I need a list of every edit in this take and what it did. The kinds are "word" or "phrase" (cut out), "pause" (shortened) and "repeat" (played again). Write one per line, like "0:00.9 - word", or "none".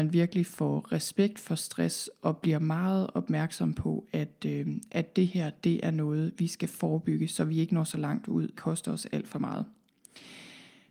0:08.6 - phrase